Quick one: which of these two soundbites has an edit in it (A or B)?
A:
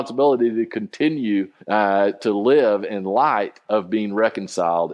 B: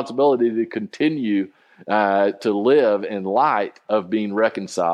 A